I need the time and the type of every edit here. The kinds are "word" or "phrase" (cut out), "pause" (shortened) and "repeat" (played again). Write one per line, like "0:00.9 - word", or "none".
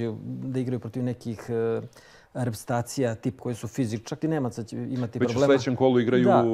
0:03.4 - word
0:04.2 - word